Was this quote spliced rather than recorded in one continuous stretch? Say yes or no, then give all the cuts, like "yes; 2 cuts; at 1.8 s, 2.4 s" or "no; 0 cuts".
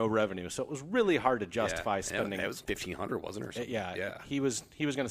yes; 1 cut; at 2.6 s